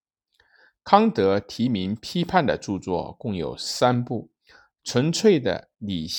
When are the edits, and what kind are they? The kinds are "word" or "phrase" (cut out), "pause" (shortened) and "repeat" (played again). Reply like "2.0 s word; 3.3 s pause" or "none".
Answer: 4.4 s pause